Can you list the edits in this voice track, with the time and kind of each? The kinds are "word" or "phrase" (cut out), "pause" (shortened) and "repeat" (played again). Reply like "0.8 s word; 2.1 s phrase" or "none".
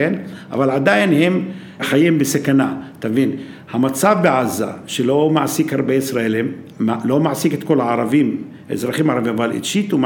1.8 s word